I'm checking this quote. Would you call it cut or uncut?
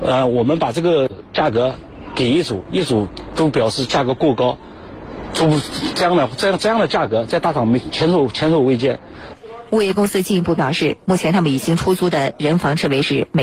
uncut